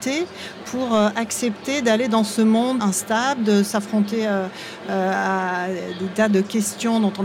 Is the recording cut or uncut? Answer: cut